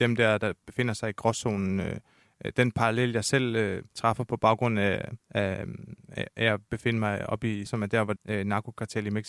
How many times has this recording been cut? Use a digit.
4